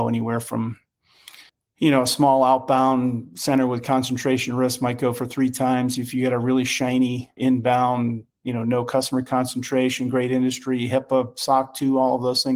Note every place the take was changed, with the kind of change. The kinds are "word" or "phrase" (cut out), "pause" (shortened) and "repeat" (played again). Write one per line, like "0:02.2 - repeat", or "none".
0:01.5 - pause
0:07.4 - word